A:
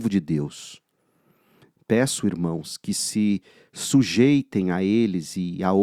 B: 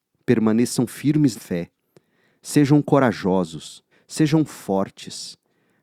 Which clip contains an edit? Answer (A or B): B